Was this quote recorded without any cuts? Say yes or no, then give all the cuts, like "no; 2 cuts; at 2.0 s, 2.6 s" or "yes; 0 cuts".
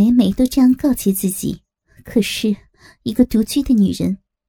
no; 1 cut; at 1.8 s